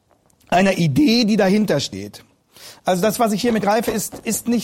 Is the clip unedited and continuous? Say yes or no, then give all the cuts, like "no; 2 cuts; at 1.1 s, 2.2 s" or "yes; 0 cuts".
no; 1 cut; at 3.6 s